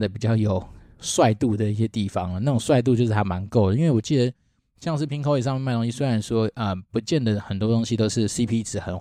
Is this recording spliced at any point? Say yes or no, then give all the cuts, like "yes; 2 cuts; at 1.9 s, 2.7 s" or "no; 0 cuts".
no; 0 cuts